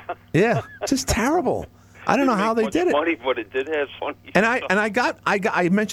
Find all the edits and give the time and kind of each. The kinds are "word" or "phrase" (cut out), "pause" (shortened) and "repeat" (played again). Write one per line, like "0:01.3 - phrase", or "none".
0:04.0 - word